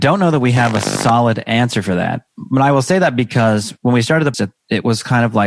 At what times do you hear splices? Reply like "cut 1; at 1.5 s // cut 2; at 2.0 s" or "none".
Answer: cut 1; at 2.3 s // cut 2; at 4.3 s

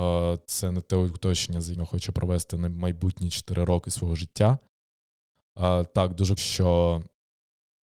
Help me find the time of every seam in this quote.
cut 1; at 1.7 s // cut 2; at 6.4 s

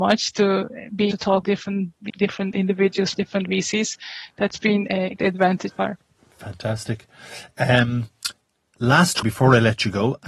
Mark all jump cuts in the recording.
cut 1; at 1.1 s // cut 2; at 1.4 s // cut 3; at 2.1 s // cut 4; at 3.1 s // cut 5; at 5.2 s // cut 6; at 5.7 s // cut 7; at 9.2 s

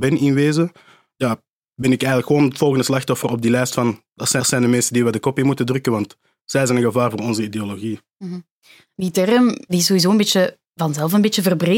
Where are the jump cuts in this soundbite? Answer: cut 1; at 4.4 s // cut 2; at 10.6 s

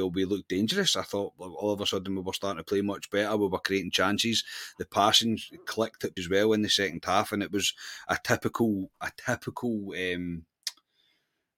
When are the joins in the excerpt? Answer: cut 1; at 6.2 s

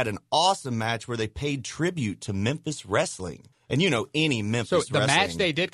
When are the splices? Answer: cut 1; at 3.5 s

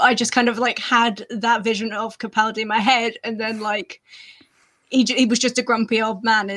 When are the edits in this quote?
none

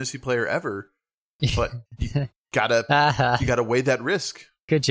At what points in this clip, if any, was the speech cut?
cut 1; at 1.9 s

